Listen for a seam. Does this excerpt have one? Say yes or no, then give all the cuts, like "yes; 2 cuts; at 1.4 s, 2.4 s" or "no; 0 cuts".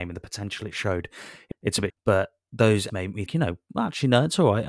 yes; 4 cuts; at 1.5 s, 1.9 s, 2.9 s, 3.3 s